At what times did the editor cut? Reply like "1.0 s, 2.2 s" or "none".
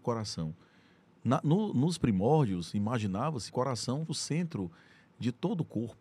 3.5 s, 4.1 s